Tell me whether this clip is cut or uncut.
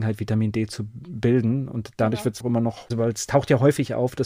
cut